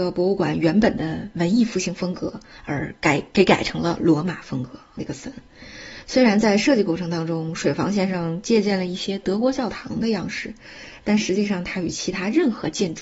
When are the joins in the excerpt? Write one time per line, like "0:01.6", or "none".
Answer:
0:05.0